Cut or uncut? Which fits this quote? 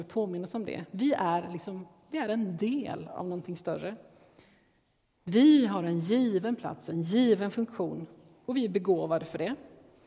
uncut